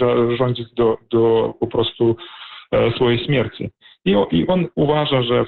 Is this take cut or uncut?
uncut